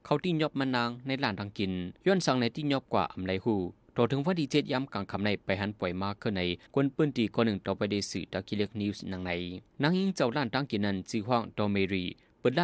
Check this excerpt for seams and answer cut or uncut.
cut